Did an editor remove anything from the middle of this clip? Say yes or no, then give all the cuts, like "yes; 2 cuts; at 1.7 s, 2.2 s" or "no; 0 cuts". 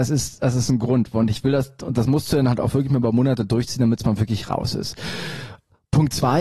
no; 0 cuts